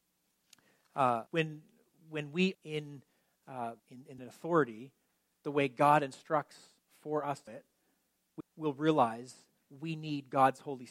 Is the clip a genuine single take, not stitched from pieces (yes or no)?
no